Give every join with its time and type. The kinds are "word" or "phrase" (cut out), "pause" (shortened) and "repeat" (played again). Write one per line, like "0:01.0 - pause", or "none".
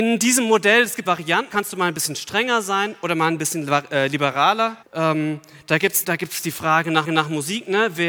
0:01.0 - word
0:01.5 - word
0:04.8 - pause
0:06.0 - word
0:07.0 - repeat